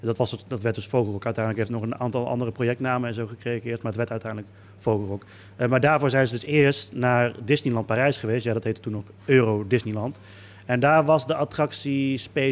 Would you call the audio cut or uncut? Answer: uncut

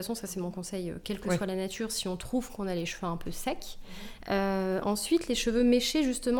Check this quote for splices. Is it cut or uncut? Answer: uncut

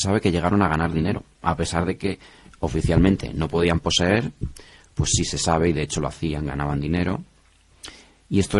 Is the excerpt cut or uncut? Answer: uncut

